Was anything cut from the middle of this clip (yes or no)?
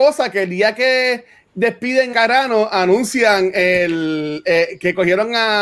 yes